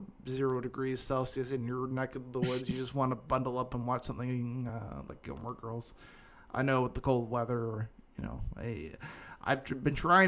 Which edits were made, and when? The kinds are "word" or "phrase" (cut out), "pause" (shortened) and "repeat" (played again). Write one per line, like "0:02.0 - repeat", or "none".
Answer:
none